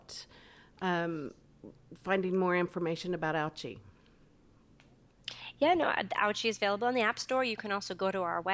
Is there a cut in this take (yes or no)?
no